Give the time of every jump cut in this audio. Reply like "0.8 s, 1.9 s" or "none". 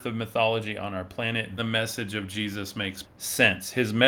1.6 s, 3.0 s